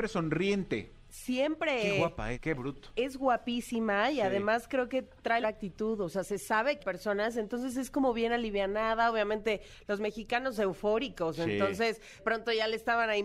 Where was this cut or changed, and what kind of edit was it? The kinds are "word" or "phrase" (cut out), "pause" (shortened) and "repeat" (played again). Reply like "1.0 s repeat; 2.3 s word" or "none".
2.3 s word; 5.4 s phrase; 6.8 s phrase; 10.5 s word; 12.2 s word